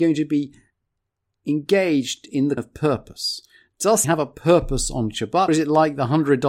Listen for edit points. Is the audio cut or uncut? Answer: cut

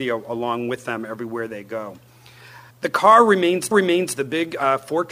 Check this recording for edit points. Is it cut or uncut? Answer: cut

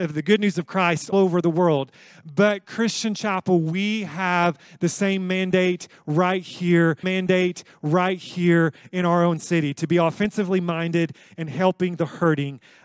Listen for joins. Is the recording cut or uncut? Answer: cut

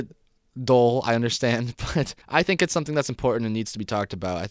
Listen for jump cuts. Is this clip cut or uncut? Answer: cut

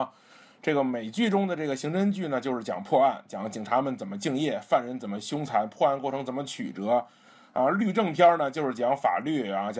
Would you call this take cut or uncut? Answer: uncut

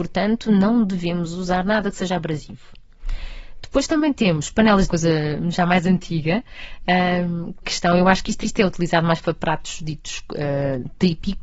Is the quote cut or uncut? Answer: cut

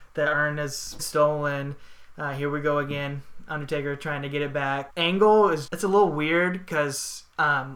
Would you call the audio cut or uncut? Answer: cut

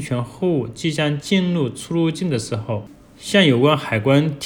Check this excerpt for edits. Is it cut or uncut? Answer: uncut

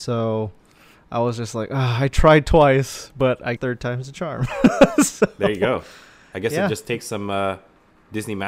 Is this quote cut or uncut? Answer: cut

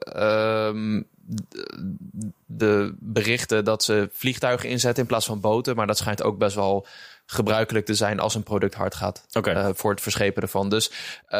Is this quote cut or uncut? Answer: uncut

